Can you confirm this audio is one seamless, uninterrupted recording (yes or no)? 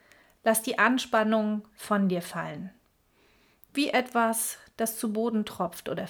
yes